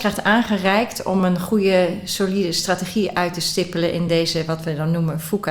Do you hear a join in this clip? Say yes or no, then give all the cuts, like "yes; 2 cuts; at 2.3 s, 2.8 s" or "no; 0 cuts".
no; 0 cuts